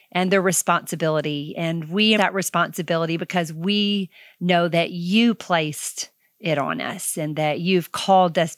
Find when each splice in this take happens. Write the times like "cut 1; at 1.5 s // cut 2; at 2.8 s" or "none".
cut 1; at 2.2 s